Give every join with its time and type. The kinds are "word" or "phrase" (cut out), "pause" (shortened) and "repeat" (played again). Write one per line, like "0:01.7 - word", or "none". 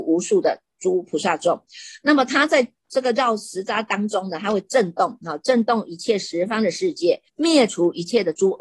0:07.3 - pause